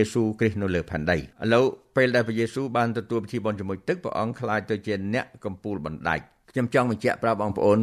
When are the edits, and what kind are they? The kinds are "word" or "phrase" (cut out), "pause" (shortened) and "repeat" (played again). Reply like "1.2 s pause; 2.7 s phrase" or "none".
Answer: 1.3 s pause

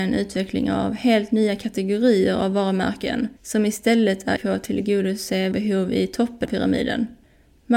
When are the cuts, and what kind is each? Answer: 3.4 s pause; 4.4 s word; 5.5 s word; 6.5 s word

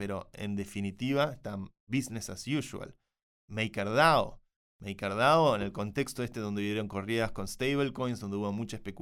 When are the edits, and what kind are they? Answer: none

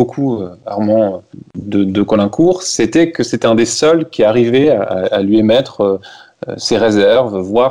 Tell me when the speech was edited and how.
none

